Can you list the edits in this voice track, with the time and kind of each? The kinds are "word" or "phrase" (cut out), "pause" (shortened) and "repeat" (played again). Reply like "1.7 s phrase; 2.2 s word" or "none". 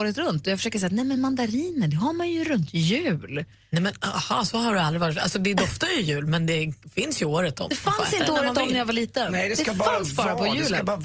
none